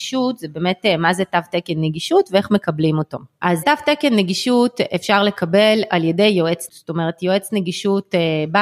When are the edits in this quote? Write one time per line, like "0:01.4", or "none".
0:03.6
0:06.7